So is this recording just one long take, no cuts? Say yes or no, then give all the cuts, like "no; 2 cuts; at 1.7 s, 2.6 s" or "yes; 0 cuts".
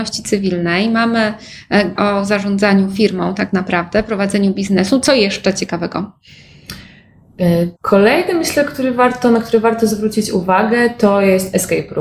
no; 2 cuts; at 2.0 s, 7.7 s